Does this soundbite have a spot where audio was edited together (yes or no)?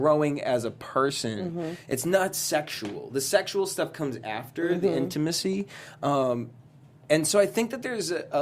no